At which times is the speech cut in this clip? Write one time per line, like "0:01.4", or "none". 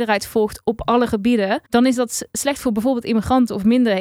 0:01.7